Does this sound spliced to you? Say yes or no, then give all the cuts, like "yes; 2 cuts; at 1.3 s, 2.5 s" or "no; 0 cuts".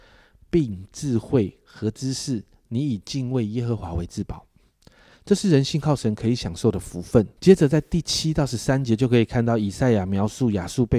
yes; 1 cut; at 7.4 s